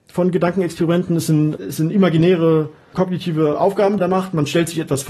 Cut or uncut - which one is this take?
cut